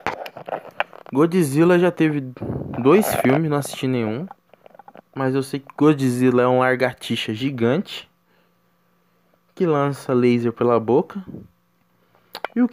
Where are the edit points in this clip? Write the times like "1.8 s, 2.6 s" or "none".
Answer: none